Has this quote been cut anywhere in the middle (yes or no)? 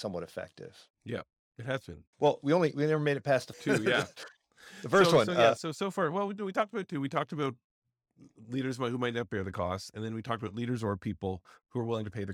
yes